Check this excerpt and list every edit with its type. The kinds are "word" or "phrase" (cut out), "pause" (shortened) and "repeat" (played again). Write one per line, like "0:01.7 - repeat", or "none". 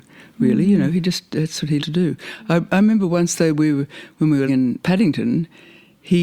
0:01.8 - word
0:04.5 - word